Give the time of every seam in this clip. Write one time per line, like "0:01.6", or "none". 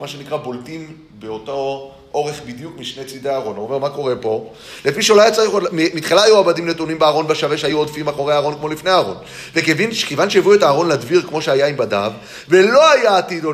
none